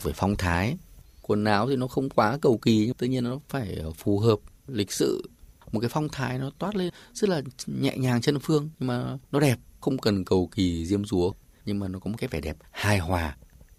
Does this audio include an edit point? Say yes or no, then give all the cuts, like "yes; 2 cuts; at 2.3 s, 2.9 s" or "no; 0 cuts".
no; 0 cuts